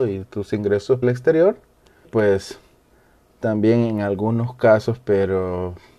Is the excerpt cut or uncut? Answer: cut